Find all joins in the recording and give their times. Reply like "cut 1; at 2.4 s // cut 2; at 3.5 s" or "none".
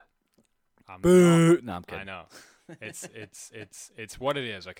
cut 1; at 3.5 s